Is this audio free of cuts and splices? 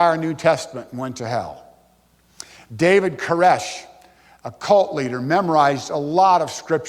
yes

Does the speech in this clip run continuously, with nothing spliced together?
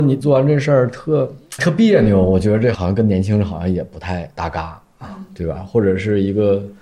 no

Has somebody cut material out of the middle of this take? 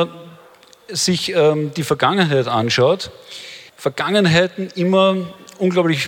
yes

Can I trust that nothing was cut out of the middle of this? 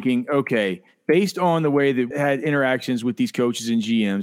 no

